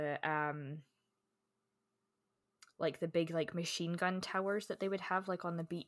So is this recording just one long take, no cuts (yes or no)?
yes